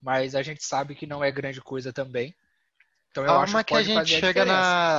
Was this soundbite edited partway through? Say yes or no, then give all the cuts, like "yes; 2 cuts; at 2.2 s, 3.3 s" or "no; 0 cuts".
no; 0 cuts